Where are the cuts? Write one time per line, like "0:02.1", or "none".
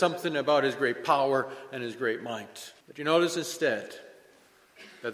0:02.8